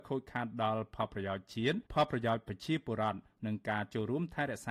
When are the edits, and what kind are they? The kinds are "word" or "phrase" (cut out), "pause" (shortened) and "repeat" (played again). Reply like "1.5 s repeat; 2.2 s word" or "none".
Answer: 1.8 s pause